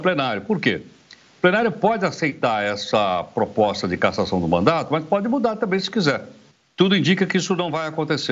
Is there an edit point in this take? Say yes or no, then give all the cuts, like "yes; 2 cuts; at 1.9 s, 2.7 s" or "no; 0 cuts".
yes; 1 cut; at 6.5 s